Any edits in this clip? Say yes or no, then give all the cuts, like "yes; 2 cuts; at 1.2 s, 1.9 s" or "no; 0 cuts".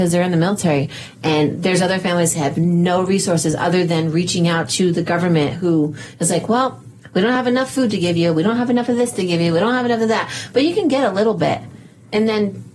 no; 0 cuts